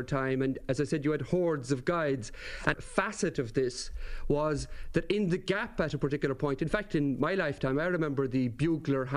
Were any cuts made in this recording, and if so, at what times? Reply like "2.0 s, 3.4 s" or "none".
2.7 s